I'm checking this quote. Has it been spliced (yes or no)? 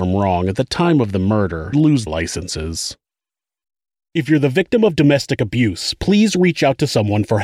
yes